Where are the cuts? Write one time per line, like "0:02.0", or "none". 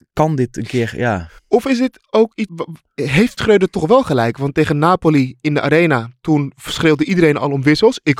0:01.4
0:02.5
0:03.4